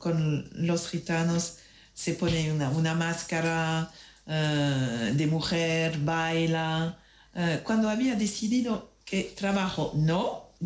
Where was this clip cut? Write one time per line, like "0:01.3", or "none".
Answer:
none